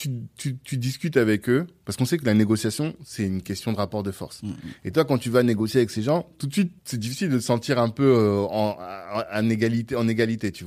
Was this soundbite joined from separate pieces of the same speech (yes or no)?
yes